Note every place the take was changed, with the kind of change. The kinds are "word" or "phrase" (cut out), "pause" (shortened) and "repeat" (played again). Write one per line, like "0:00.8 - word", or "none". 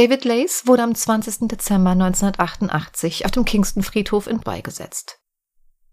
0:04.4 - word